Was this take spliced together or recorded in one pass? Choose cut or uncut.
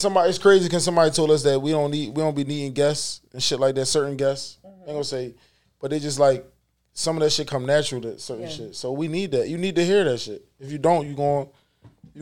uncut